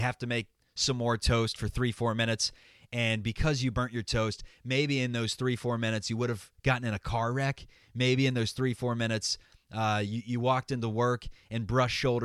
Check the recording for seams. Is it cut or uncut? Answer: uncut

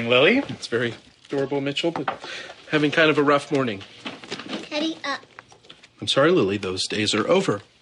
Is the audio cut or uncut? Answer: uncut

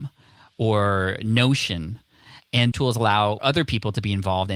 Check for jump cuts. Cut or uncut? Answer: cut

